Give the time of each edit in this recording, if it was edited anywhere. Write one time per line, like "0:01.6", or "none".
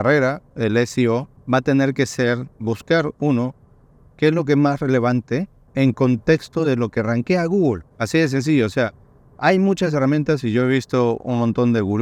none